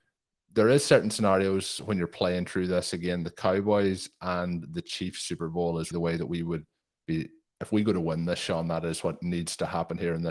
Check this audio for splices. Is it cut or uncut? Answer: cut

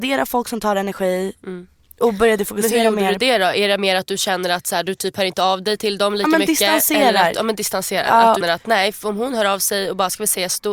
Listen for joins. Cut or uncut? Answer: cut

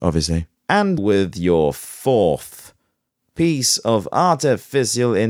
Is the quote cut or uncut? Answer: cut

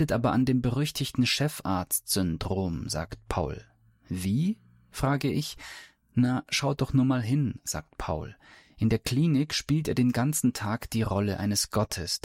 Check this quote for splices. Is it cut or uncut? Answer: uncut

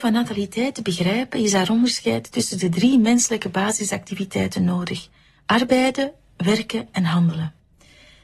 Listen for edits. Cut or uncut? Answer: uncut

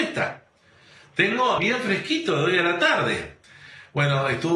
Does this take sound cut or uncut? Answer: cut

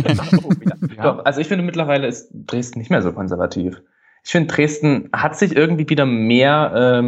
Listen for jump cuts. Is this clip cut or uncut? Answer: uncut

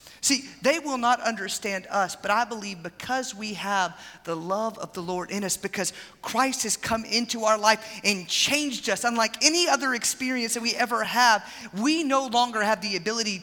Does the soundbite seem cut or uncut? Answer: uncut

